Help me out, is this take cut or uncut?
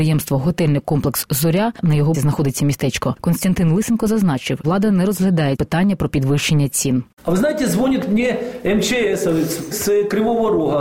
cut